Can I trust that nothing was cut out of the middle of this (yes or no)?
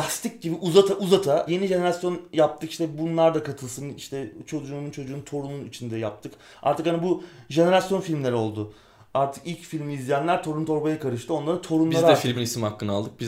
no